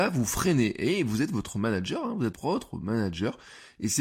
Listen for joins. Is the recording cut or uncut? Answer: cut